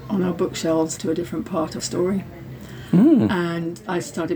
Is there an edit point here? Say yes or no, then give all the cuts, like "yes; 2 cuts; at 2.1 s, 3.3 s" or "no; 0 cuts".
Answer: yes; 2 cuts; at 1.0 s, 1.8 s